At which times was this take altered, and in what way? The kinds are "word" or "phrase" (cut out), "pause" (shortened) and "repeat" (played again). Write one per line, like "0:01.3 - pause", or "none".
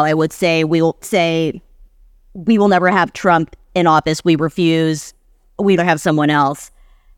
0:01.0 - word
0:05.8 - word